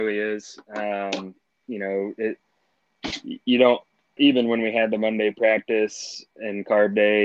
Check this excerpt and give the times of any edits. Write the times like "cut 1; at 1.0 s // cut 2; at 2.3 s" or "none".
cut 1; at 4.2 s